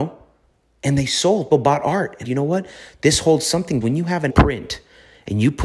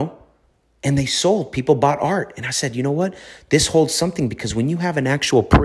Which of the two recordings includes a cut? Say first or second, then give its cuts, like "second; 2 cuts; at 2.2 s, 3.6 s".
first; 4 cuts; at 1.5 s, 2.2 s, 3.8 s, 4.3 s